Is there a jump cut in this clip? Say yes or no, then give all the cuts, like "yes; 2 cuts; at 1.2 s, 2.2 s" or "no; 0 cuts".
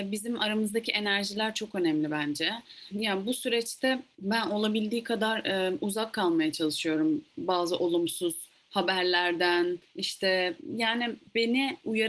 no; 0 cuts